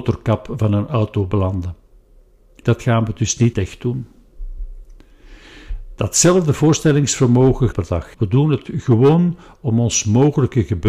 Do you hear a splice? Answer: yes; 4 cuts; at 2.6 s, 3.5 s, 7.7 s, 8.1 s

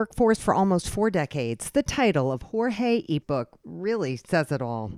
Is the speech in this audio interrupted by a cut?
yes; 1 cut; at 3.2 s

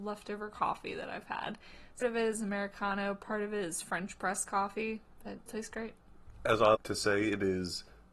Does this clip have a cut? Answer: yes; 3 cuts; at 2.0 s, 5.5 s, 6.7 s

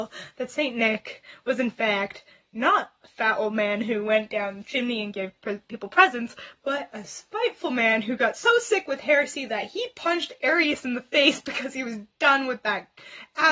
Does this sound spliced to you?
no; 0 cuts

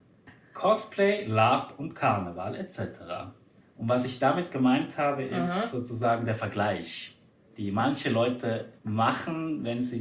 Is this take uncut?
no; 3 cuts; at 3.6 s, 7.3 s, 8.8 s

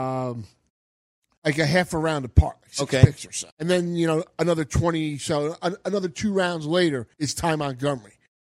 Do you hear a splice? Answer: yes; 3 cuts; at 1.4 s, 3.5 s, 7.1 s

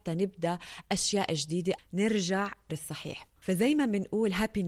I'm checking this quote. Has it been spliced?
yes; 2 cuts; at 1.8 s, 2.7 s

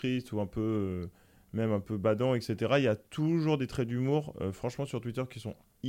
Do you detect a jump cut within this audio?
no; 0 cuts

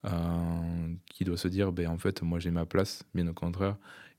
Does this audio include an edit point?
no; 0 cuts

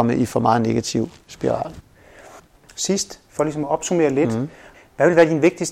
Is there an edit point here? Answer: no; 0 cuts

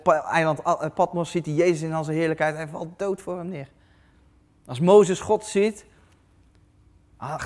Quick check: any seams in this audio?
no; 0 cuts

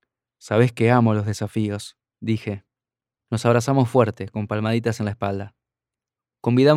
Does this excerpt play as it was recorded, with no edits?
yes; 0 cuts

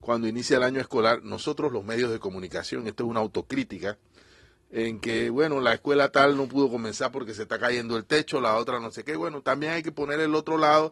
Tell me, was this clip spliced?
no; 0 cuts

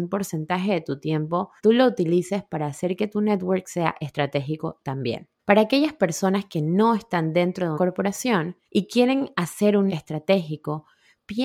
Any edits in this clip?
yes; 5 cuts; at 1.6 s, 5.4 s, 7.7 s, 8.6 s, 9.9 s

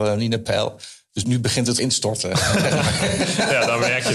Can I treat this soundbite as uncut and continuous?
no; 2 cuts; at 1.2 s, 1.8 s

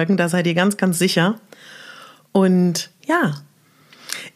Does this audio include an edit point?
no; 0 cuts

